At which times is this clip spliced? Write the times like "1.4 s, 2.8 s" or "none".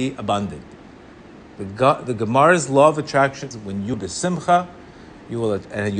3.5 s, 3.9 s